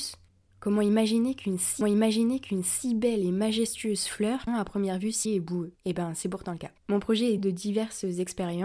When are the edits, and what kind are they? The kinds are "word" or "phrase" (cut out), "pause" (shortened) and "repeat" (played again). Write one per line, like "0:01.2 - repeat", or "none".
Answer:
0:01.8 - repeat
0:04.5 - phrase
0:05.3 - word
0:05.8 - pause
0:06.8 - pause
0:07.4 - word